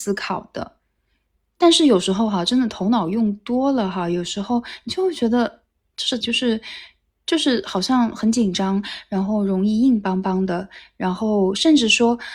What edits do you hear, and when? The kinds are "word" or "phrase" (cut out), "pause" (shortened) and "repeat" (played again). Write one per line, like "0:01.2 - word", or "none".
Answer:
0:06.2 - word